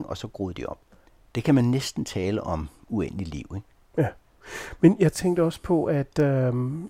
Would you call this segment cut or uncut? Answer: cut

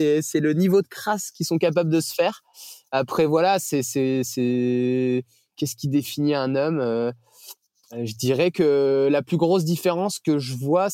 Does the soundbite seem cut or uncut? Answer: uncut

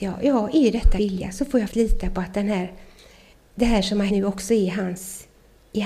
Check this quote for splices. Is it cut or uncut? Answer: cut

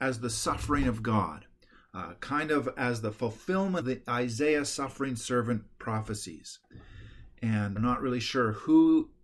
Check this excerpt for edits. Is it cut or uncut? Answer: cut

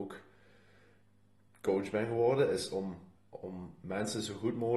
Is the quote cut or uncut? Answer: cut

